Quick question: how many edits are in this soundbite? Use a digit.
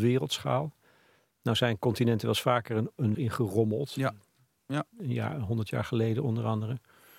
1